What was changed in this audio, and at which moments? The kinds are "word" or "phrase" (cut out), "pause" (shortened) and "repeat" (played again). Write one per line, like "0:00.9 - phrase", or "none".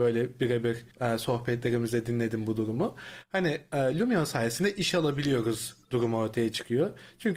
0:00.9 - pause

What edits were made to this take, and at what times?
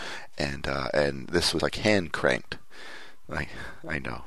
0:01.6 - word

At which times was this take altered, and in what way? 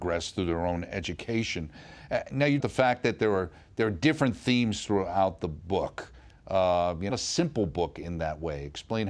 0:02.6 - phrase
0:07.1 - phrase

